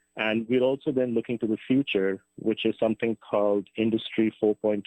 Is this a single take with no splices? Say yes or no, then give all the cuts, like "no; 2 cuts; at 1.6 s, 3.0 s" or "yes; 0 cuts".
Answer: yes; 0 cuts